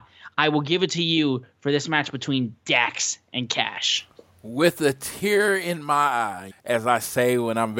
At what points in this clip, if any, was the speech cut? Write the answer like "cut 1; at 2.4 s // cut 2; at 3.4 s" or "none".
cut 1; at 6.5 s